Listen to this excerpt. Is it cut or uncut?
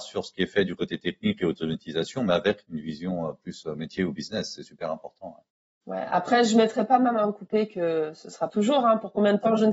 cut